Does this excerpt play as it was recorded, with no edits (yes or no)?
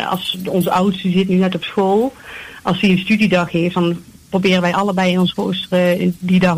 yes